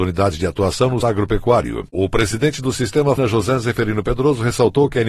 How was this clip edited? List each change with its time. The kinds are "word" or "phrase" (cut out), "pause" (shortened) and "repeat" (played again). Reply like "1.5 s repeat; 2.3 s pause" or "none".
1.0 s word; 3.2 s phrase